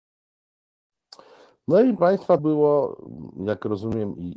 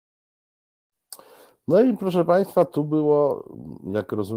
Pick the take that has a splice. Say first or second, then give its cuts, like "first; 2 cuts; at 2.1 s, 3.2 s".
first; 2 cuts; at 2.0 s, 2.4 s